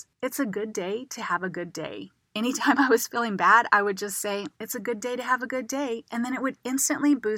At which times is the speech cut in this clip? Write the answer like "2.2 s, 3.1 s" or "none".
4.5 s